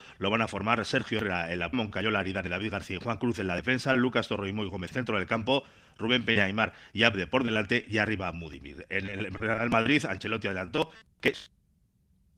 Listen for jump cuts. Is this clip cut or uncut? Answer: cut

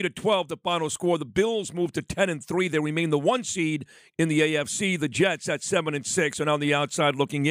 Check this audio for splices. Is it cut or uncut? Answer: uncut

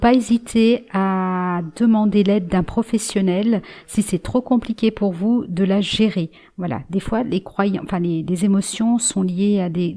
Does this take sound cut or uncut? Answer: uncut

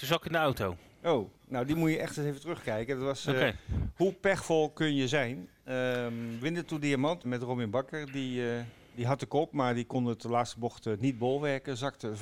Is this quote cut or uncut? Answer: cut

